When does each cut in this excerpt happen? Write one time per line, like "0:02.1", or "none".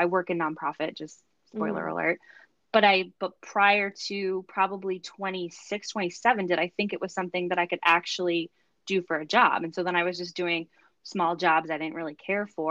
none